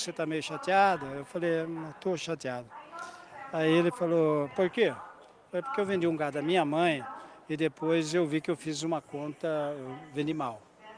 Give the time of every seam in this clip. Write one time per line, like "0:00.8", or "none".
none